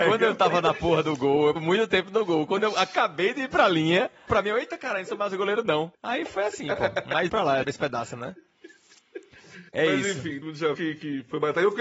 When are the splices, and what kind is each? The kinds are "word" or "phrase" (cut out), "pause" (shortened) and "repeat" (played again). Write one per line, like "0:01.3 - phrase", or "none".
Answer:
0:01.6 - word
0:04.3 - phrase
0:05.9 - pause
0:07.3 - word
0:07.6 - word
0:09.7 - pause
0:10.4 - word
0:10.7 - word